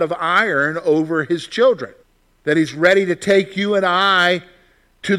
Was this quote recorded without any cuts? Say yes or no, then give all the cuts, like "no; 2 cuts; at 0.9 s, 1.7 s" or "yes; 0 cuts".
no; 1 cut; at 2.0 s